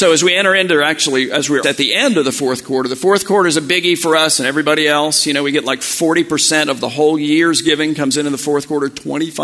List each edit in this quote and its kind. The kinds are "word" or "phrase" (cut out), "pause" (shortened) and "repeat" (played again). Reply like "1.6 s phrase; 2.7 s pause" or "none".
1.6 s word